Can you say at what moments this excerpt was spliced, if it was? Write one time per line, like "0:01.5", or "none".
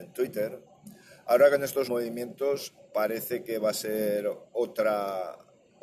0:01.9
0:04.5